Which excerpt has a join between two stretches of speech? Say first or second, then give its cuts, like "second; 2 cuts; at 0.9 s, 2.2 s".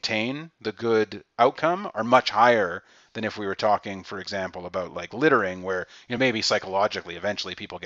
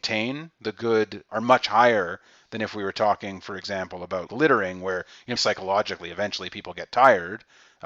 second; 3 cuts; at 1.3 s, 4.3 s, 5.4 s